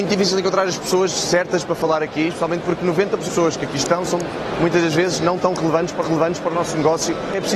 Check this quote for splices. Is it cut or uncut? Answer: cut